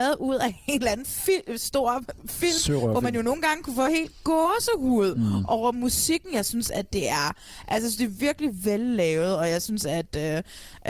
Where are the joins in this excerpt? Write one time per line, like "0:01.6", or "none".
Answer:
none